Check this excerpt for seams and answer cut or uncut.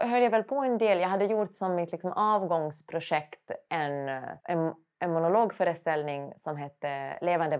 cut